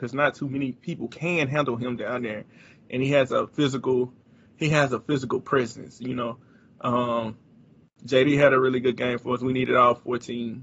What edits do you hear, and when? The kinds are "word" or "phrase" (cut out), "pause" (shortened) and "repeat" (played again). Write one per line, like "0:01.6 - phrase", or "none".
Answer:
none